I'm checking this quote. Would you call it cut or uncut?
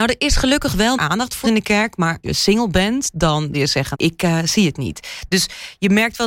cut